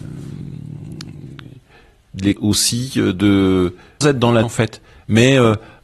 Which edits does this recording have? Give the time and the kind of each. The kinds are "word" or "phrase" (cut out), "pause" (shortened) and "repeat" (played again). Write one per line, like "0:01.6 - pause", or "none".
0:02.4 - word
0:04.0 - word
0:04.4 - word